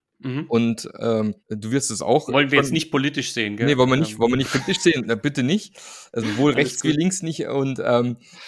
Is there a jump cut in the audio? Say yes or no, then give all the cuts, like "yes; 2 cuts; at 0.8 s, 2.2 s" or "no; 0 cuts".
yes; 1 cut; at 1.4 s